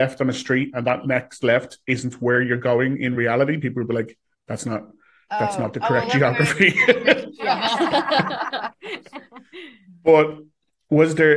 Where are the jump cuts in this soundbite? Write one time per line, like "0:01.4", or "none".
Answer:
none